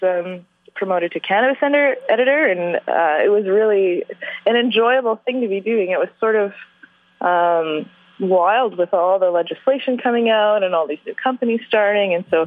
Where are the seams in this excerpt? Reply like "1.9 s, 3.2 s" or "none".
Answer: none